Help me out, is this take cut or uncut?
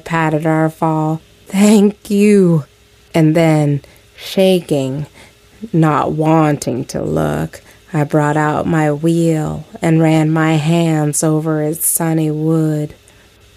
uncut